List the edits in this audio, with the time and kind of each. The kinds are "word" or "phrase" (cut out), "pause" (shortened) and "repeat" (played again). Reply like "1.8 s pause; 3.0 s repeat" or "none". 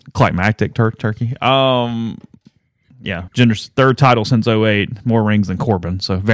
3.3 s word